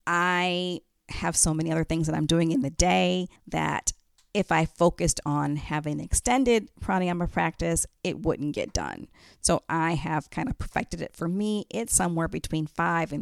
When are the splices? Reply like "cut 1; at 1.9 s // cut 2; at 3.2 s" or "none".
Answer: cut 1; at 3.4 s